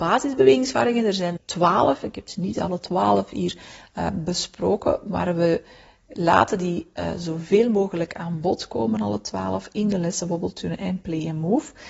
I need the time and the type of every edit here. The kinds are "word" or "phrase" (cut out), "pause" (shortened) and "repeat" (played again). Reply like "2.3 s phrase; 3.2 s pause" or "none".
1.4 s word